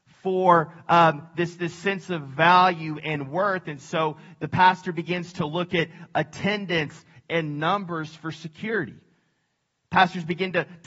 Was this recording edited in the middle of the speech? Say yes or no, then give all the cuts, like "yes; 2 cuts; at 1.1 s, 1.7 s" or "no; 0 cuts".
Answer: no; 0 cuts